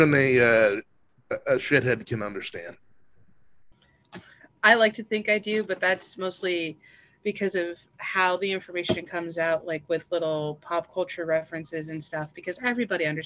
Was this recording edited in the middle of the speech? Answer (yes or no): no